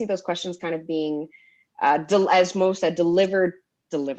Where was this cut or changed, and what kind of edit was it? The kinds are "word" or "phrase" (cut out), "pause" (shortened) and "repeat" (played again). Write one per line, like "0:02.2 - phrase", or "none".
none